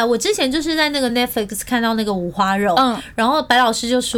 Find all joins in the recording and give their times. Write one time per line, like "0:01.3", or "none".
none